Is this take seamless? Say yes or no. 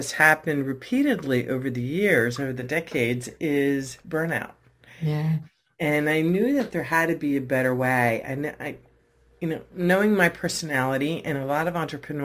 yes